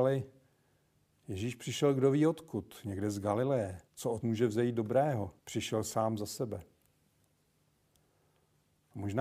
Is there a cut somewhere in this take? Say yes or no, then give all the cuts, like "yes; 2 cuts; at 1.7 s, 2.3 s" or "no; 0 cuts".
yes; 3 cuts; at 3.9 s, 4.2 s, 5.4 s